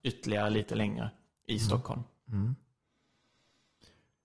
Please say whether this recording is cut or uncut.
uncut